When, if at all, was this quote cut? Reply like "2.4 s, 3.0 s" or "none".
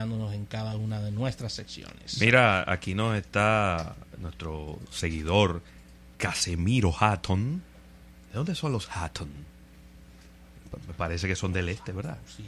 6.1 s